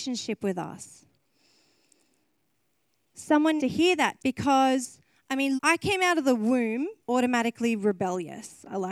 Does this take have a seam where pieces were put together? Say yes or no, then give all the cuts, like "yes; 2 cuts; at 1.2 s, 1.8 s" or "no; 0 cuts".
yes; 4 cuts; at 3.6 s, 4.2 s, 5.6 s, 7.0 s